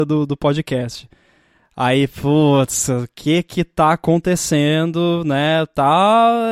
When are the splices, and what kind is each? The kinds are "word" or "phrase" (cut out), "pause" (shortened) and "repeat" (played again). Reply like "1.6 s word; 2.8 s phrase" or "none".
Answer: none

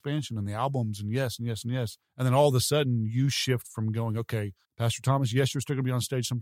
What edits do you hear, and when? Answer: 2.0 s pause; 4.6 s pause

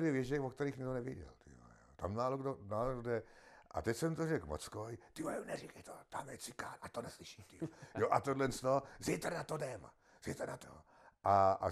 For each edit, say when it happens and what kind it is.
10.6 s word

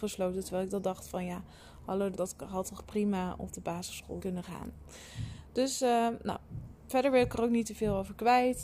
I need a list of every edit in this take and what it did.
2.1 s word; 4.2 s word

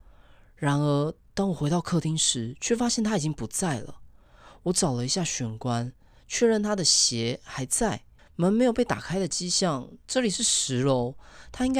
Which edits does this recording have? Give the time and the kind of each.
8.2 s pause

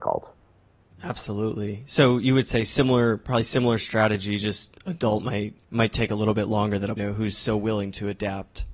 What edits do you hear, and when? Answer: 5.6 s pause; 7.0 s phrase

